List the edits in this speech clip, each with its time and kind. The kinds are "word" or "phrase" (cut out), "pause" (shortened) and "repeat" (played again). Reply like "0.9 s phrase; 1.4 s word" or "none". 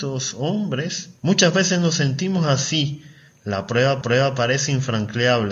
1.2 s pause; 4.0 s repeat